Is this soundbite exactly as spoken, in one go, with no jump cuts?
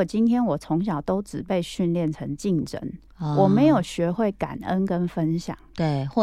yes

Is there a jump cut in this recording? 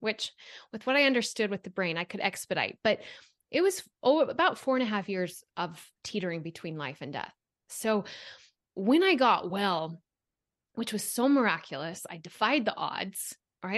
no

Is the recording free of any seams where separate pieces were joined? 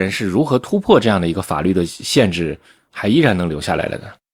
yes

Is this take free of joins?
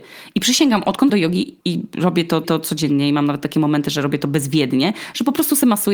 no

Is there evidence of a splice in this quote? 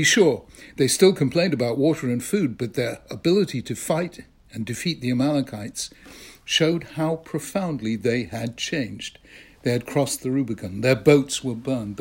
no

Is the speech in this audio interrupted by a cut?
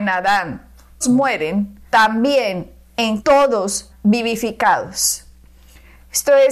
yes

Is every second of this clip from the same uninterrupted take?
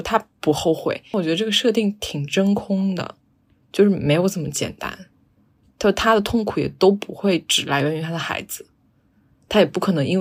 yes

